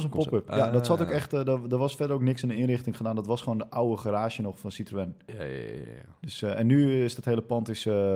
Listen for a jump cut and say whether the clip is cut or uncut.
uncut